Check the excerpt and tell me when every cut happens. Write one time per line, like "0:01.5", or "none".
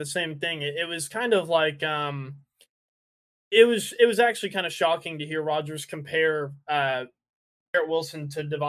none